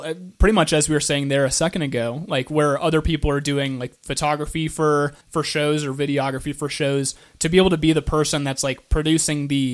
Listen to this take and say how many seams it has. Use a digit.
1